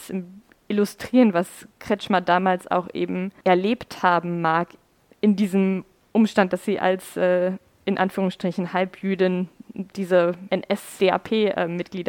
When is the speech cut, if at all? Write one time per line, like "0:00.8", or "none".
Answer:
none